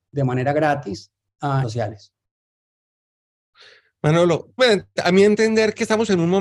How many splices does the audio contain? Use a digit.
2